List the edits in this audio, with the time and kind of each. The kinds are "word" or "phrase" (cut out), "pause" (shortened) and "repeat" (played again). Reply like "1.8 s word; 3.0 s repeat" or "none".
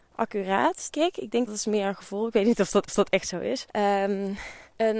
0.9 s word; 1.5 s phrase; 2.9 s repeat

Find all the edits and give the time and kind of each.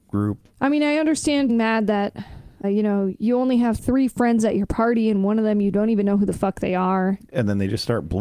1.5 s word; 2.6 s word

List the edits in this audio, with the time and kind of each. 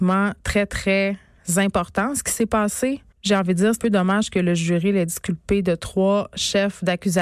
3.1 s pause; 3.8 s word

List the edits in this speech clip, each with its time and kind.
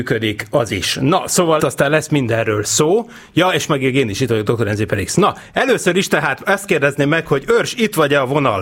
1.6 s word

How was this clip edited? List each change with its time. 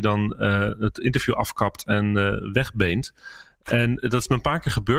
none

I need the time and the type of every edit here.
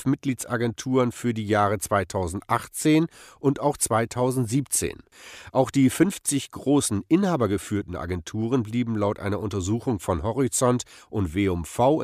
none

